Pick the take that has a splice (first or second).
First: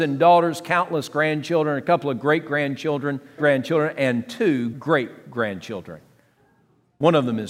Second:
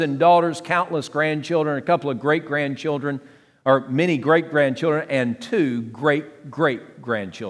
first